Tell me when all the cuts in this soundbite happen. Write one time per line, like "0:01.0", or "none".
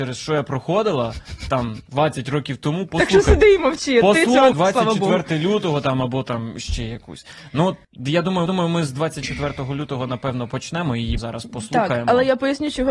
0:04.5
0:07.8
0:08.5
0:11.2